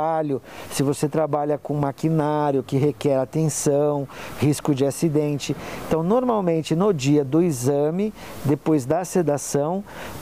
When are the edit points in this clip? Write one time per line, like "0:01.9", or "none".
none